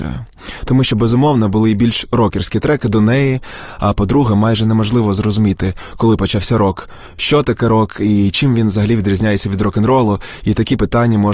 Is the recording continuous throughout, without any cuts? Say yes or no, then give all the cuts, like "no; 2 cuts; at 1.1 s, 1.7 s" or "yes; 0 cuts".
yes; 0 cuts